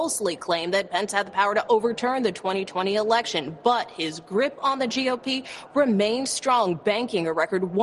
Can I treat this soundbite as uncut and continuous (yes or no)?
yes